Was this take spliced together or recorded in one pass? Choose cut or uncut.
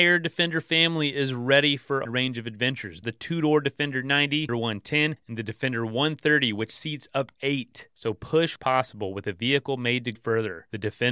cut